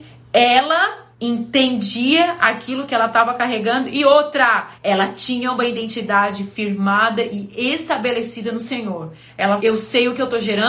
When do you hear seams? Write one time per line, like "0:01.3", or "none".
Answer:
0:01.1
0:04.8
0:09.6